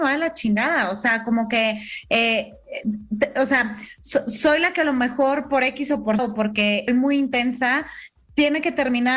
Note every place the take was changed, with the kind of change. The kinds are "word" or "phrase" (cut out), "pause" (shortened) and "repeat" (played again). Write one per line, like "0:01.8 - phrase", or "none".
0:06.2 - word
0:06.9 - word